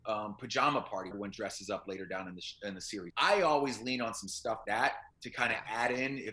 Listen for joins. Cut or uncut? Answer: cut